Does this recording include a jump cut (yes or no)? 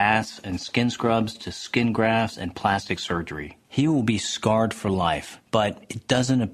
yes